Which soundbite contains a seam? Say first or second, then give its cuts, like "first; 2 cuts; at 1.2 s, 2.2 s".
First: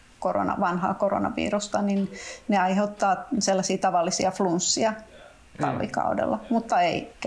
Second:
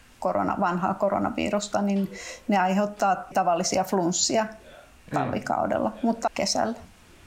second; 2 cuts; at 3.3 s, 6.3 s